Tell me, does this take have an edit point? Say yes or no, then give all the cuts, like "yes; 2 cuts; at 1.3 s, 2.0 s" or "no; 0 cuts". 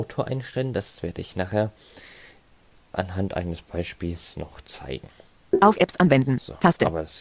no; 0 cuts